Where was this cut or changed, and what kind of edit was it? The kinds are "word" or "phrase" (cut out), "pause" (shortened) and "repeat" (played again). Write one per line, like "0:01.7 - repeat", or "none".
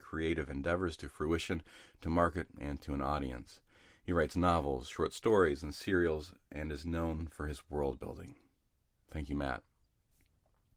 none